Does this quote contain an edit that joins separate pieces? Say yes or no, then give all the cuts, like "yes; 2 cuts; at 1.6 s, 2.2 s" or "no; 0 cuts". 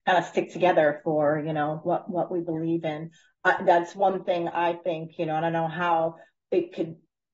no; 0 cuts